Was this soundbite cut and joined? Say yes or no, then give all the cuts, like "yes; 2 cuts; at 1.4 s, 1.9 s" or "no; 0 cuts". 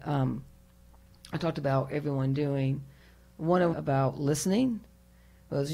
yes; 1 cut; at 3.7 s